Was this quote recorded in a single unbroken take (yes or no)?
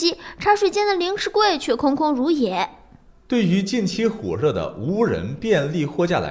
yes